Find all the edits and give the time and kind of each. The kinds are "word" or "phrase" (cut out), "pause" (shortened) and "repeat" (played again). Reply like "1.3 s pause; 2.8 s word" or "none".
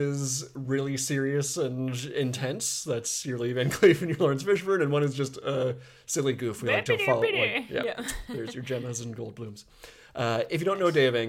none